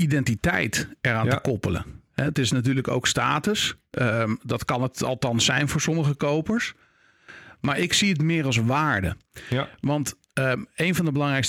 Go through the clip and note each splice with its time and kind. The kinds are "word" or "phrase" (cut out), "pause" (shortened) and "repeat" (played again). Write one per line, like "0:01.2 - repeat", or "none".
none